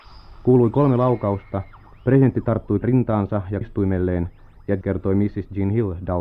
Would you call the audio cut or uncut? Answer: cut